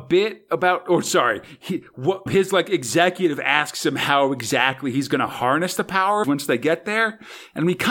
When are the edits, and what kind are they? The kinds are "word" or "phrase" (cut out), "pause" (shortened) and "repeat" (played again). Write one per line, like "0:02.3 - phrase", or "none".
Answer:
0:02.3 - word
0:06.2 - phrase